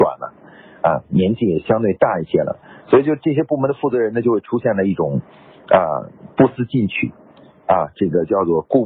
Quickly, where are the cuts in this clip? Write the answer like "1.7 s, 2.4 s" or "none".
none